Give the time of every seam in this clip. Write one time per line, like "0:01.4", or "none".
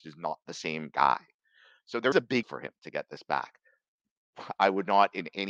0:02.1
0:02.4